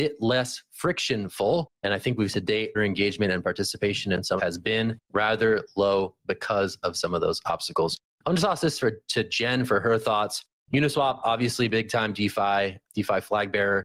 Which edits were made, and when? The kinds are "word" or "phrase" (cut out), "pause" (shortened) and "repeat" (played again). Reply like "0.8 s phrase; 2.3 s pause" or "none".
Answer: 1.7 s pause; 2.3 s word; 2.7 s phrase; 4.4 s phrase; 5.0 s pause; 12.8 s word